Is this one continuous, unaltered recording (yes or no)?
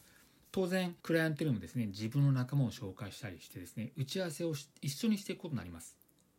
no